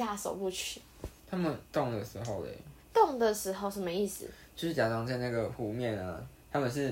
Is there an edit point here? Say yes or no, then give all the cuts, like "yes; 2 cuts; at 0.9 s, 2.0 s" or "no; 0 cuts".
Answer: yes; 3 cuts; at 1.2 s, 1.7 s, 2.8 s